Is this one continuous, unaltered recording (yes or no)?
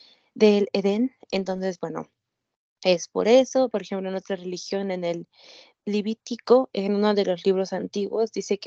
yes